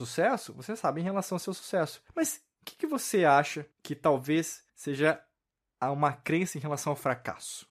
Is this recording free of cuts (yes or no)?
no